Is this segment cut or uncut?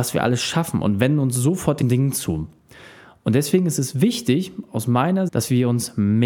cut